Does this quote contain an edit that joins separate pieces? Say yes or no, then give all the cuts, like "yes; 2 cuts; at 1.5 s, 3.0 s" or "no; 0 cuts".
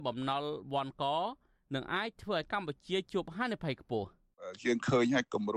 no; 0 cuts